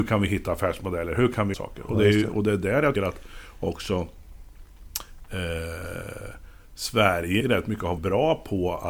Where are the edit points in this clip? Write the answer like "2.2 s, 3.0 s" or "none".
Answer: 1.5 s, 3.0 s, 7.4 s, 8.0 s